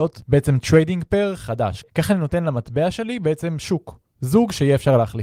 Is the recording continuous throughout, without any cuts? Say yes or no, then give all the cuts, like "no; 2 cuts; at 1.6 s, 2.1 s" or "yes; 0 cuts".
no; 1 cut; at 1.9 s